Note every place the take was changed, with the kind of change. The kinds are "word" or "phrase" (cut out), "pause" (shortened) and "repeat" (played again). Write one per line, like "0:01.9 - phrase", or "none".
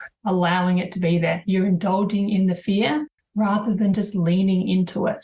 none